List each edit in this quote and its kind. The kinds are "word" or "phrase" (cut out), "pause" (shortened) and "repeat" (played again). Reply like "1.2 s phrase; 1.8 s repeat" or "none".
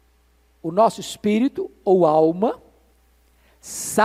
none

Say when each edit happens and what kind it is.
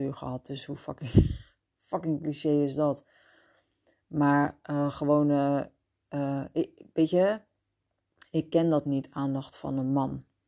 none

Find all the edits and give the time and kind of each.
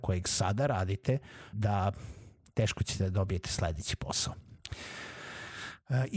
1.5 s phrase

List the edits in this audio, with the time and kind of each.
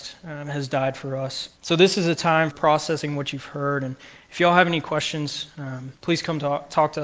1.6 s pause; 2.5 s word; 6.0 s pause

